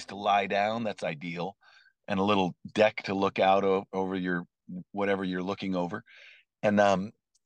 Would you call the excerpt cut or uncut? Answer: uncut